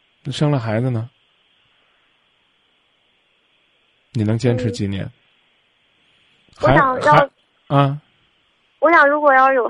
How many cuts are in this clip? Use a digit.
0